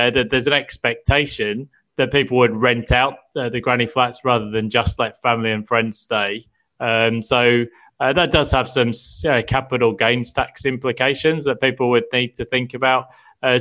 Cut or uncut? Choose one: uncut